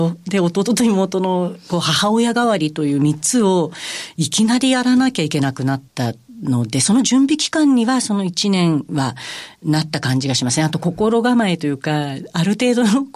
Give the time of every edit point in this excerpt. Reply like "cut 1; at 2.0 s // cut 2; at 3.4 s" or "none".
cut 1; at 5.9 s